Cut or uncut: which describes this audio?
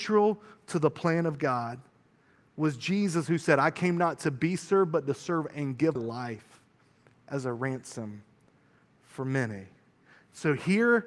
cut